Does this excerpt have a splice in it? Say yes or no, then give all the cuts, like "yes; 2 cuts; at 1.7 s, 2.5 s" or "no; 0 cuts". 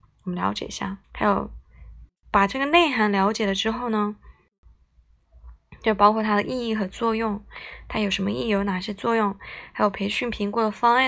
yes; 2 cuts; at 1.0 s, 2.1 s